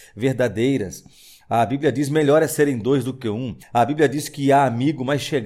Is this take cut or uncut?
cut